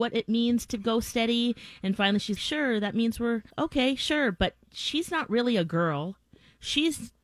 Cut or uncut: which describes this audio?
cut